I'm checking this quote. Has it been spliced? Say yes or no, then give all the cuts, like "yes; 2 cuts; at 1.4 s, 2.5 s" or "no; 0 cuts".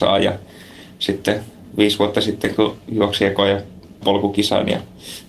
yes; 1 cut; at 4.0 s